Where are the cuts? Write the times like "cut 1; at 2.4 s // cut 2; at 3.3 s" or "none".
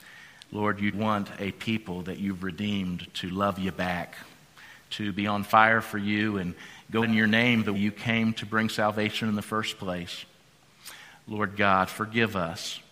cut 1; at 0.9 s // cut 2; at 7.0 s // cut 3; at 7.7 s